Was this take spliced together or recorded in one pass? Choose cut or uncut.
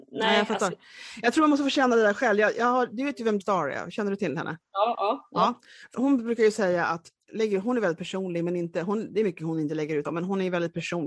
cut